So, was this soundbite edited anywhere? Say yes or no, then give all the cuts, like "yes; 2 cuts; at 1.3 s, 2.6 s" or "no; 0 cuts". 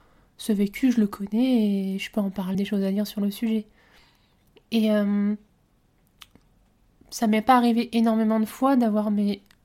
yes; 1 cut; at 2.5 s